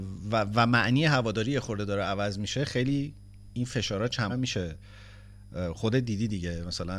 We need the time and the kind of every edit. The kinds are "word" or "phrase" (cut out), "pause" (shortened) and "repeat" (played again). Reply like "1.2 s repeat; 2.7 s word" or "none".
4.3 s word